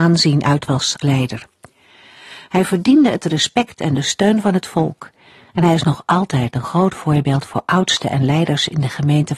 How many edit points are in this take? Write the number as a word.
one